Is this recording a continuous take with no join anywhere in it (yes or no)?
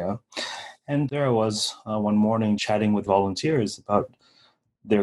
no